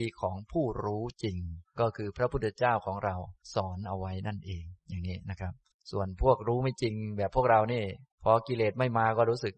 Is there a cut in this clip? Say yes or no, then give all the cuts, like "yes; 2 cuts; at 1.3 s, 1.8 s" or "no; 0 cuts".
yes; 4 cuts; at 3.4 s, 4.8 s, 5.7 s, 8.1 s